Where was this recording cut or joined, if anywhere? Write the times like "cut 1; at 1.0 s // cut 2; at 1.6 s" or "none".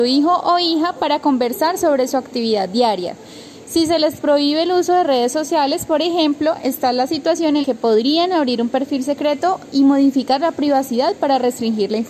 cut 1; at 7.6 s